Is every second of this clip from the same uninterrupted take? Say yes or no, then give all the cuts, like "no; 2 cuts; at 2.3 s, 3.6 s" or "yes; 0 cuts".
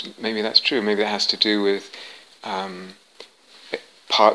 yes; 0 cuts